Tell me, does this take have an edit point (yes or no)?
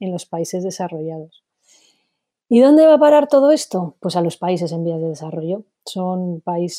no